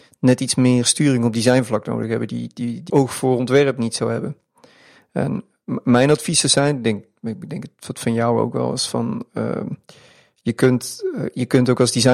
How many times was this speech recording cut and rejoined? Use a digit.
1